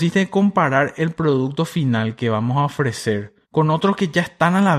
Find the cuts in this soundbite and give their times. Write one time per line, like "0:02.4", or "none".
0:03.4